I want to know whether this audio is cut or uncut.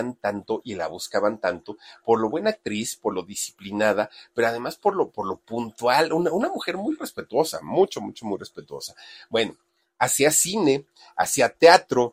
uncut